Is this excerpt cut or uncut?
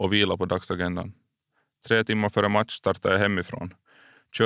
uncut